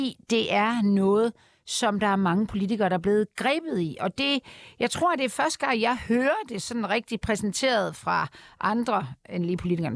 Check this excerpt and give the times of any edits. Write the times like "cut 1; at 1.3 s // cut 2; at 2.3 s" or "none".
none